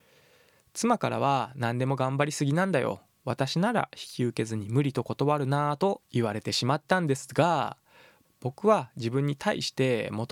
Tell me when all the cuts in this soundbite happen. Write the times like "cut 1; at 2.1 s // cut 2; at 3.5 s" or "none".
none